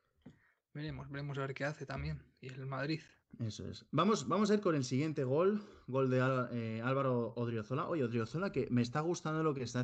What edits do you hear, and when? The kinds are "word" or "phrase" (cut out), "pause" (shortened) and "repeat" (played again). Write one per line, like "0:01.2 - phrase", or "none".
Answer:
0:03.2 - pause